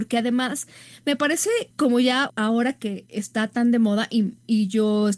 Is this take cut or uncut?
cut